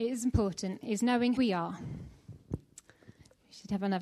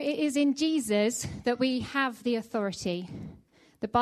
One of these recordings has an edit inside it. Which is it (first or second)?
first